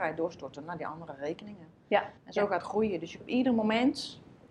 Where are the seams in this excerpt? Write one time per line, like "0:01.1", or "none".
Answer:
0:02.2
0:02.6
0:03.2